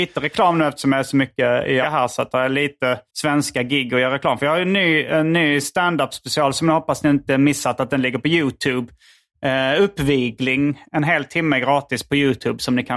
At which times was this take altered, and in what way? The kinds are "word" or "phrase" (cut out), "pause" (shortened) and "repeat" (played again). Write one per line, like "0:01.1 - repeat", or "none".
0:01.8 - word
0:03.1 - pause